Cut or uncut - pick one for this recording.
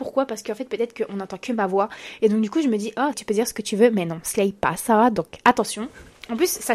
cut